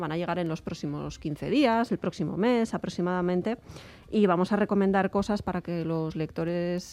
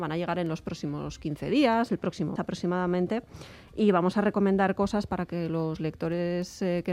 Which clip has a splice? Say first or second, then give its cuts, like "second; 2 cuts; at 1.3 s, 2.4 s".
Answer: second; 1 cut; at 2.4 s